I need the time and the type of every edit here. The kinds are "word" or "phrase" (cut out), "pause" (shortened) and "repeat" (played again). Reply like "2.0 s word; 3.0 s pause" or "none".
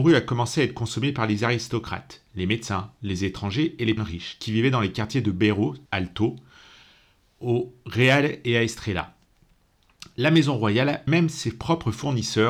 4.0 s word; 5.9 s pause; 11.1 s word